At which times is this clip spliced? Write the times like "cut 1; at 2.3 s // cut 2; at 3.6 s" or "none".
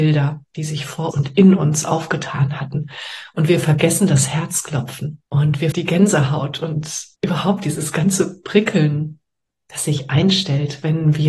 cut 1; at 1.1 s // cut 2; at 5.3 s // cut 3; at 5.7 s // cut 4; at 7.1 s // cut 5; at 9.5 s